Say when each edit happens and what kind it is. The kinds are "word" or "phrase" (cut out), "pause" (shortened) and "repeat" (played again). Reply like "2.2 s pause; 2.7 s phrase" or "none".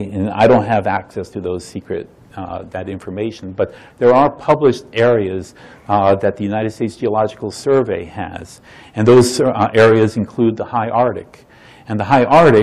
none